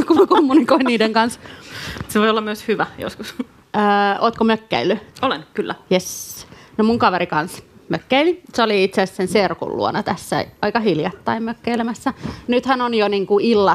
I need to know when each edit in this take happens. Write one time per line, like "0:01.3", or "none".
0:05.1